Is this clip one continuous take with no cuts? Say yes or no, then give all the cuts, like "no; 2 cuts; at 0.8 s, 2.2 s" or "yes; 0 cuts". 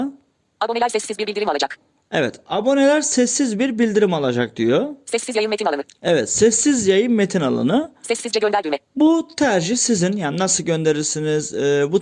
yes; 0 cuts